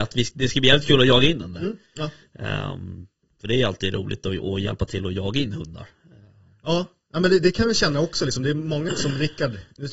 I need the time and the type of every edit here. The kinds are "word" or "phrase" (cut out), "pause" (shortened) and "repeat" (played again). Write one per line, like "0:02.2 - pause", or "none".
0:01.9 - pause
0:08.9 - word